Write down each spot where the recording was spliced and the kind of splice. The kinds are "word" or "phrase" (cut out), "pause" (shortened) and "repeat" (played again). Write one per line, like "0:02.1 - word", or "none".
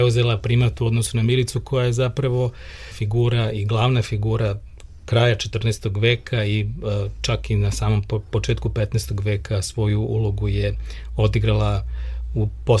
0:02.9 - word